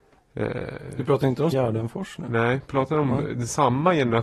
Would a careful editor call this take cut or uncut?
cut